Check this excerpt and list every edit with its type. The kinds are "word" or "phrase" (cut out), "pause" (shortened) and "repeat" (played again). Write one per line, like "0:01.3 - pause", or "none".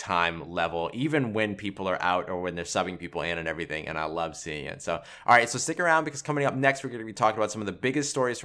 none